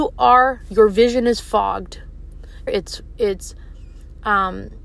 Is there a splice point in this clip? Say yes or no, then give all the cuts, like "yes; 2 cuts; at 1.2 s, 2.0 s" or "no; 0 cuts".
yes; 1 cut; at 2.7 s